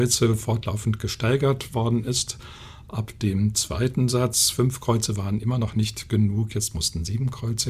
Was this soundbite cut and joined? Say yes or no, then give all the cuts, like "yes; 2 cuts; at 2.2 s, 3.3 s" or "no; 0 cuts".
no; 0 cuts